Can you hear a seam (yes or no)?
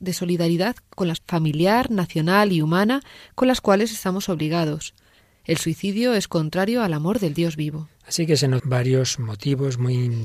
yes